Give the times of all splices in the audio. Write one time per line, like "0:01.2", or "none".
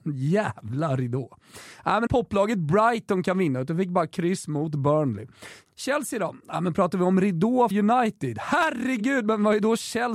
0:02.1
0:07.7